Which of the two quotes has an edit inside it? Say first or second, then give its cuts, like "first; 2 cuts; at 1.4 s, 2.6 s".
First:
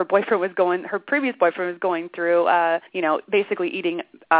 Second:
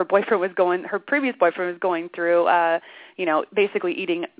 first; 1 cut; at 2.9 s